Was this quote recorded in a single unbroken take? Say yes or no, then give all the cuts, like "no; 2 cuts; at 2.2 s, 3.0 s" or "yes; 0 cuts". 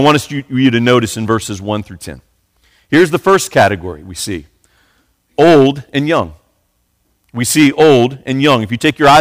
yes; 0 cuts